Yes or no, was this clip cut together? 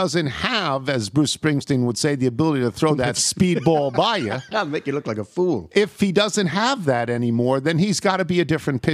no